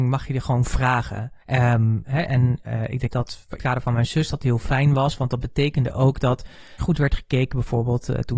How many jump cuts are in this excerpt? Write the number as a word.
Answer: five